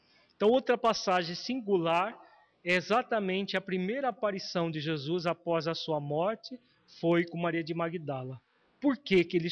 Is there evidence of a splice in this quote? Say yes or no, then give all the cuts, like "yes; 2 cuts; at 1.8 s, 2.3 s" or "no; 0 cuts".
no; 0 cuts